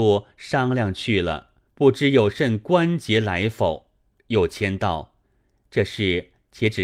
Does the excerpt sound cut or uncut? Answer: cut